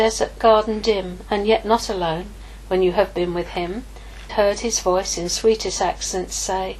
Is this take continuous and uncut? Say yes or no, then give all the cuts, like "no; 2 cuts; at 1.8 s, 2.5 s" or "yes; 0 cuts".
no; 1 cut; at 4.3 s